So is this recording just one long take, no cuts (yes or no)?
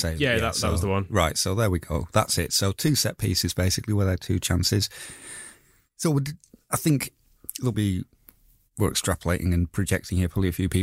no